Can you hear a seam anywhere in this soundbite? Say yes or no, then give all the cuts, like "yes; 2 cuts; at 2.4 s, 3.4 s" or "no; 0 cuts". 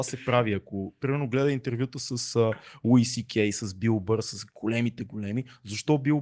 no; 0 cuts